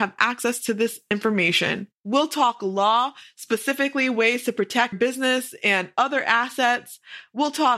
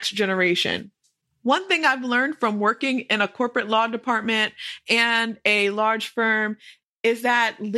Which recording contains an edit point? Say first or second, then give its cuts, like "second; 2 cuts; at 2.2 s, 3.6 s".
first; 2 cuts; at 2.0 s, 4.9 s